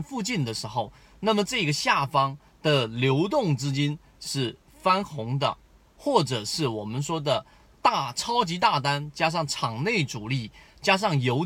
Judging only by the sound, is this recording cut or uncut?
uncut